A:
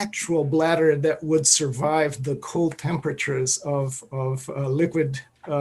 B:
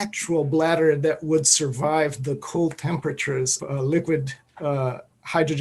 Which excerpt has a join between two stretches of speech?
B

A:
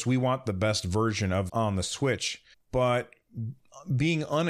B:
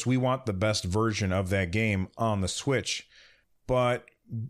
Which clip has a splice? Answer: A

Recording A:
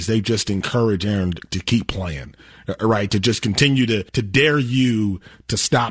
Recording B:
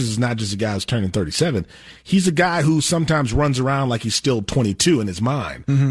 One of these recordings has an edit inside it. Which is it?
A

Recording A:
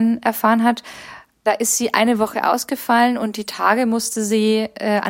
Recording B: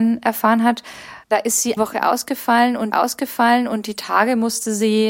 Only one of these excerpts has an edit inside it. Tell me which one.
B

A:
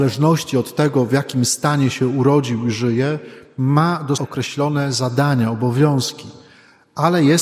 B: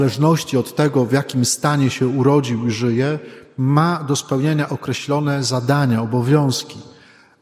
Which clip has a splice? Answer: A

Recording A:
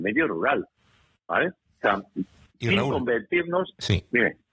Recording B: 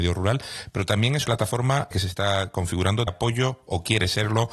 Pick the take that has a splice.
B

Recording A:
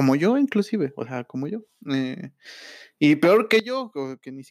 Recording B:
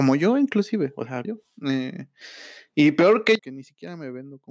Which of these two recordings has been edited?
B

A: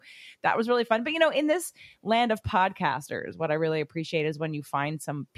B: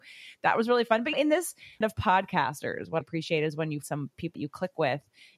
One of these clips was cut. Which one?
B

